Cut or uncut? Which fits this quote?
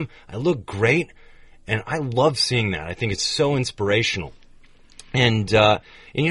uncut